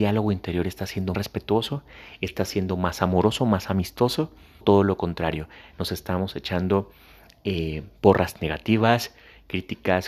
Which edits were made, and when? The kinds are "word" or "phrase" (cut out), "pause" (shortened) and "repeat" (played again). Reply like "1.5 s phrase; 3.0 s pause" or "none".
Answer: 1.1 s word; 4.6 s word